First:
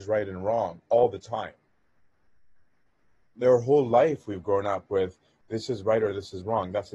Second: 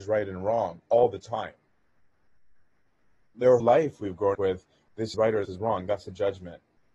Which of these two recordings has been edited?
second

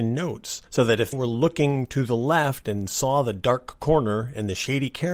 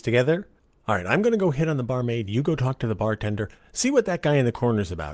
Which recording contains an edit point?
first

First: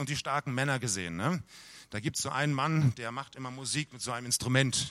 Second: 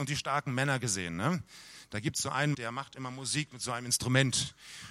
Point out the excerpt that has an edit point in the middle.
second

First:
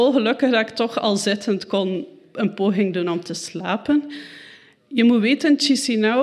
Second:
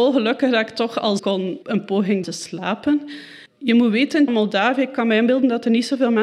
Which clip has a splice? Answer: second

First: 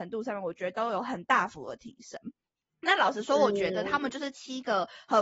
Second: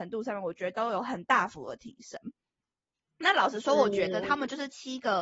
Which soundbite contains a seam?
first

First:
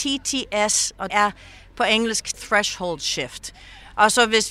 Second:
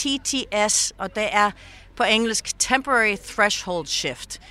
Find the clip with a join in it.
first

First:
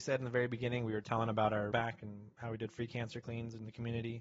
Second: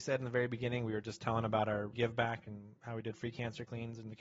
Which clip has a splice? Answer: first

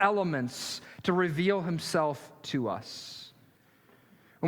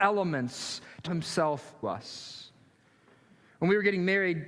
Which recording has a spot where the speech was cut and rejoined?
second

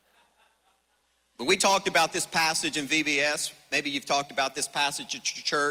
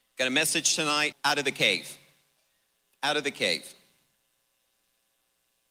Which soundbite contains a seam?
second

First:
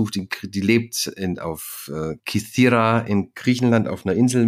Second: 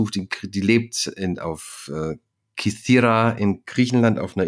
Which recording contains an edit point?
first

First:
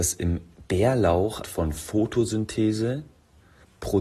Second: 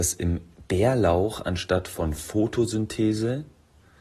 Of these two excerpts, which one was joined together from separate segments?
first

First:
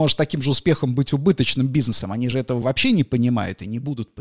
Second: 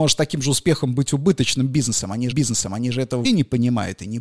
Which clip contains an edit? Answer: second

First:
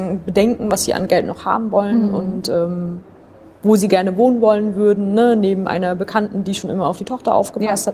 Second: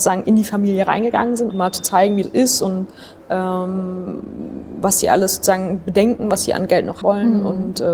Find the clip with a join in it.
second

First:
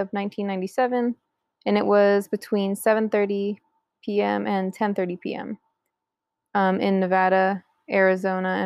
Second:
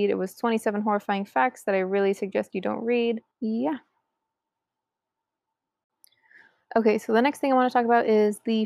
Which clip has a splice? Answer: second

